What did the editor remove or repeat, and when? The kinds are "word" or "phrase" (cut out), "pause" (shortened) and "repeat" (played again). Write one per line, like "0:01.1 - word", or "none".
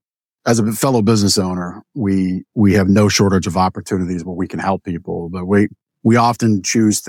none